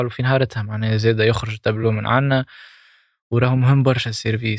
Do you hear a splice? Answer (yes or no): no